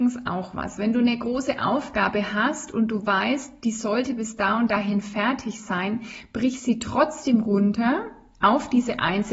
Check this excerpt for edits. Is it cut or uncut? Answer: uncut